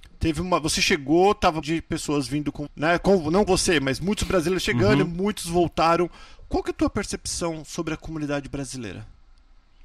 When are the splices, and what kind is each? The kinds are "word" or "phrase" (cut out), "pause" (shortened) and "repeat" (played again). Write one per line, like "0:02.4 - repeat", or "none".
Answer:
0:01.6 - word
0:02.7 - word
0:03.5 - word